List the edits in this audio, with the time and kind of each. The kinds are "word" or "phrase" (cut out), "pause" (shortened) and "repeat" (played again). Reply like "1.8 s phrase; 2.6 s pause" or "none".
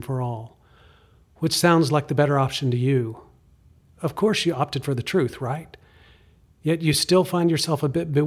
none